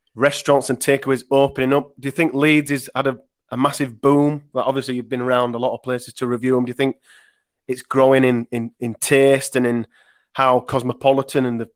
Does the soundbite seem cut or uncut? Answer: uncut